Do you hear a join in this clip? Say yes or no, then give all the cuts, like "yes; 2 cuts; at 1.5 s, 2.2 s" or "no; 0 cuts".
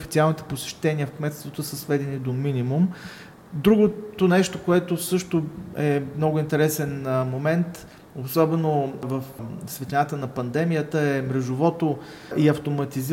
no; 0 cuts